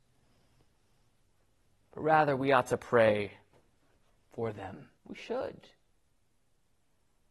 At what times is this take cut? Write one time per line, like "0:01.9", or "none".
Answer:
0:05.0